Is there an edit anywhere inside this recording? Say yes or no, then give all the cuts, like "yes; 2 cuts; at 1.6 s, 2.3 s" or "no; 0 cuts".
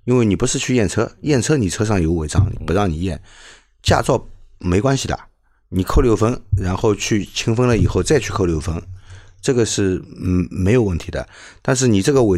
no; 0 cuts